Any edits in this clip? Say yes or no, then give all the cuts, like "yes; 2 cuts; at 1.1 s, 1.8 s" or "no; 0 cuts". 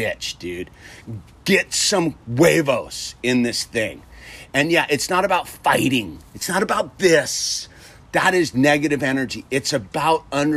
no; 0 cuts